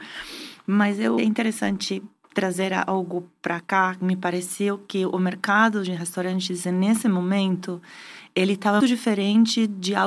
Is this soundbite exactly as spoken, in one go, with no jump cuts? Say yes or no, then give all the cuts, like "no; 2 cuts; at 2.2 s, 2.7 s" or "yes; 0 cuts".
no; 2 cuts; at 1.2 s, 8.8 s